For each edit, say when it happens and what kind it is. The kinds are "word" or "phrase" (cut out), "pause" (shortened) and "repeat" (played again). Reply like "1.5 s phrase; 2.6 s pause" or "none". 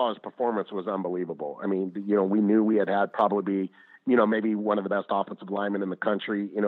none